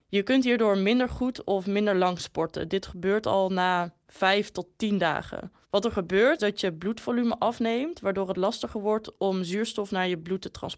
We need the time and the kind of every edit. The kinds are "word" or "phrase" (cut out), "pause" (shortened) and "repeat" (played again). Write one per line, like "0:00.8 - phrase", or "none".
0:05.6 - pause
0:06.4 - word